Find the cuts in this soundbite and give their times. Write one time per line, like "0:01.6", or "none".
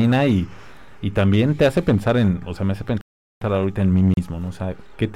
none